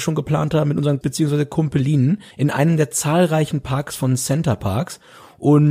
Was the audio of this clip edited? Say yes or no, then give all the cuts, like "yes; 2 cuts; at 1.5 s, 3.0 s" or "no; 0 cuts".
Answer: yes; 2 cuts; at 1.0 s, 2.3 s